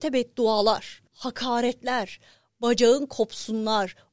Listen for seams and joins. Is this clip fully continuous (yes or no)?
no